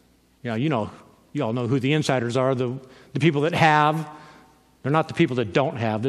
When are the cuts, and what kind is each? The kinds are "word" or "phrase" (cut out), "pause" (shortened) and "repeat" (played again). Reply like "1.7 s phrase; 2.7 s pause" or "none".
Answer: none

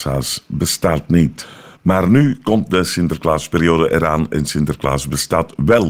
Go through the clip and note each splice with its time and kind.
none

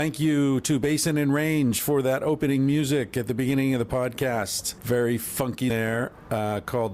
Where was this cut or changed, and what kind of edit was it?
5.7 s phrase

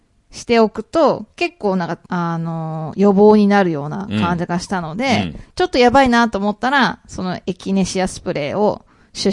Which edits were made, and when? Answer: 2.1 s pause; 5.5 s pause

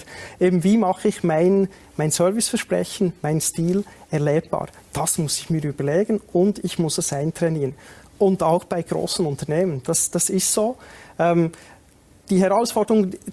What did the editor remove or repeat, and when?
none

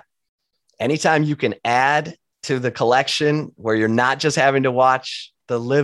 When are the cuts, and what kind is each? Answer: none

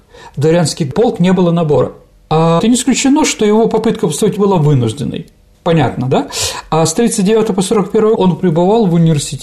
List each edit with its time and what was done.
2.6 s word; 4.4 s word; 8.1 s word

